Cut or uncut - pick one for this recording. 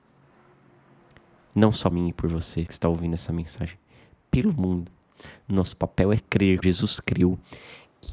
cut